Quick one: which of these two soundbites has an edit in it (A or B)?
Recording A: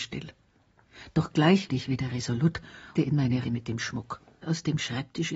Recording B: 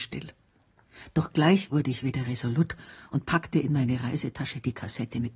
A